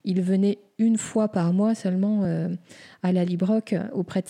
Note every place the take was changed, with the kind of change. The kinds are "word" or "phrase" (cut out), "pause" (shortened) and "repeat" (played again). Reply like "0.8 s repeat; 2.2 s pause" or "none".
none

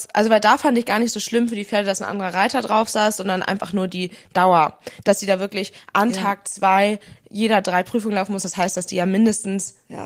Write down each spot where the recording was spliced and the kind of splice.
none

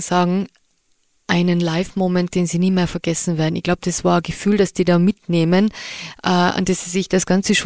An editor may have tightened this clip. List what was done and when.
2.3 s word

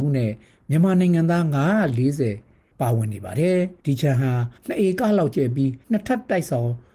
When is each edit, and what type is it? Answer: 3.8 s pause; 4.6 s pause; 5.8 s pause

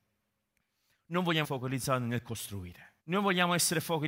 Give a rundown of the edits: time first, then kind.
1.4 s word; 3.0 s pause

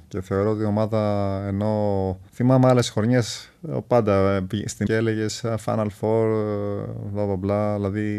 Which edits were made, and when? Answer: 2.3 s pause; 4.9 s phrase

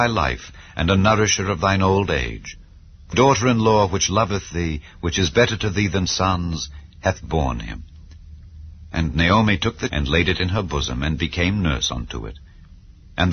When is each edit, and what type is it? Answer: 3.1 s word; 6.1 s word; 9.9 s word

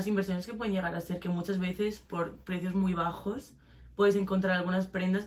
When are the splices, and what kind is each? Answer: none

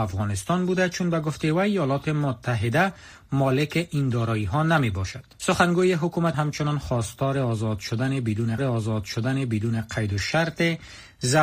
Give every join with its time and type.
5.3 s pause; 6.3 s word; 8.6 s repeat

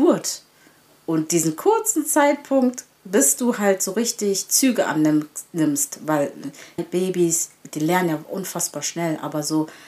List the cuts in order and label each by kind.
6.8 s phrase

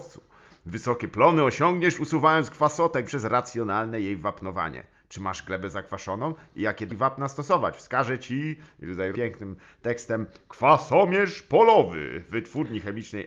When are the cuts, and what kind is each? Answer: 3.0 s word; 6.9 s word; 9.1 s word

